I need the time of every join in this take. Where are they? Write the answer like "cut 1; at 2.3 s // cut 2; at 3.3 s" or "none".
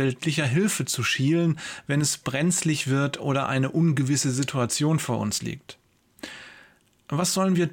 none

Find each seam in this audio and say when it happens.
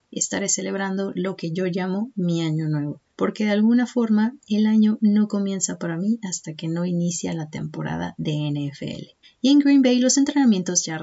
cut 1; at 3.1 s // cut 2; at 9.2 s

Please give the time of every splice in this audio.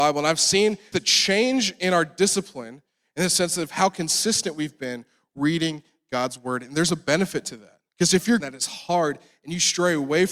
cut 1; at 0.9 s // cut 2; at 7.9 s // cut 3; at 8.4 s

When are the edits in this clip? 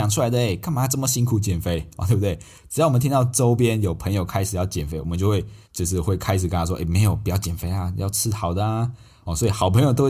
cut 1; at 5.6 s

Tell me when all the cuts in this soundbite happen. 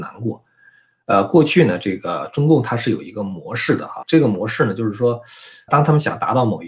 cut 1; at 4.0 s // cut 2; at 5.7 s

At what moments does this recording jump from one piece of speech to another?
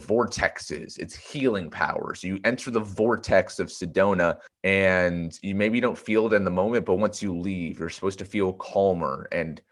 cut 1; at 4.5 s

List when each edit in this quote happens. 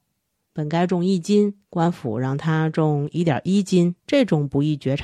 cut 1; at 1.6 s // cut 2; at 4.0 s

